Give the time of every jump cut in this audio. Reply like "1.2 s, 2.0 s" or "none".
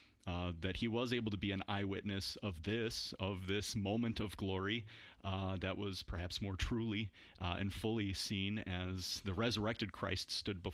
none